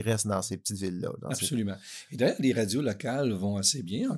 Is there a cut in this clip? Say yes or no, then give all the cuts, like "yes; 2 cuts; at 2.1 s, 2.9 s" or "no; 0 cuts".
no; 0 cuts